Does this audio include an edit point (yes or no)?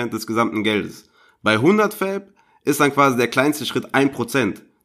no